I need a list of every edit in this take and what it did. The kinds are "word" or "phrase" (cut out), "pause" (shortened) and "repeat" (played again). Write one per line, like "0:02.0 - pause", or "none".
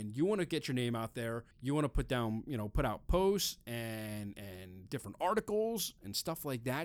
0:01.5 - pause

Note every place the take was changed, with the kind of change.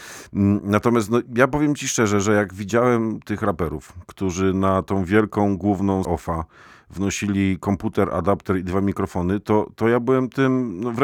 0:06.0 - word

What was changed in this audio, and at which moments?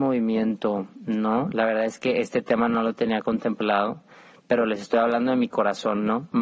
none

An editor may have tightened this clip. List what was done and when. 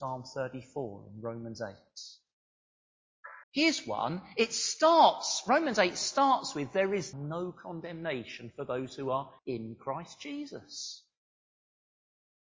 0:03.4 - pause
0:07.1 - word
0:09.4 - pause

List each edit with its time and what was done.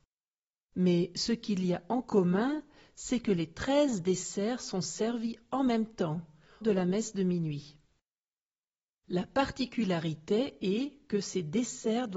0:06.6 - phrase

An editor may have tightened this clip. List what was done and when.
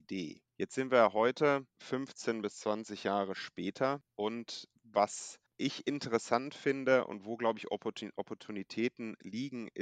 none

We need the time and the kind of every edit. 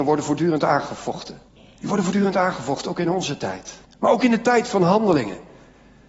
0:01.5 - pause
0:03.8 - pause

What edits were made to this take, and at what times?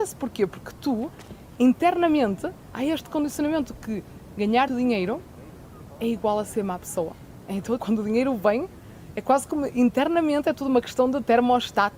0:04.7 - word
0:07.8 - word

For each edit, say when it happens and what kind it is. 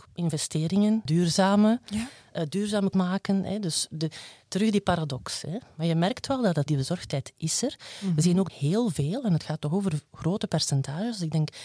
0:01.1 - word
0:02.9 - word
0:06.7 - word
0:08.5 - word

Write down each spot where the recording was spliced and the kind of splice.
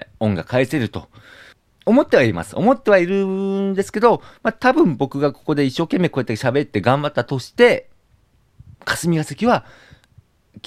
0:01.5 - pause
0:08.7 - pause

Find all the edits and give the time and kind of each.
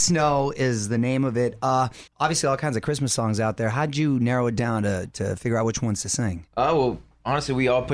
0:02.1 - pause
0:06.5 - pause

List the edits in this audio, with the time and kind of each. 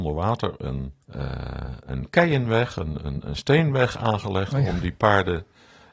0:01.0 - pause

